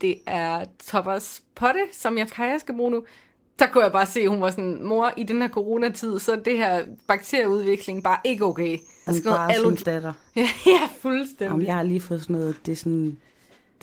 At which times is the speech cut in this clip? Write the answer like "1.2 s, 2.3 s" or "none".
2.3 s, 8.0 s, 9.1 s, 9.8 s